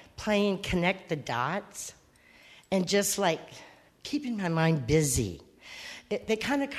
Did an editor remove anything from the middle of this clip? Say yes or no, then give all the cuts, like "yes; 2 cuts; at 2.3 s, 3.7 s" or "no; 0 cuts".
no; 0 cuts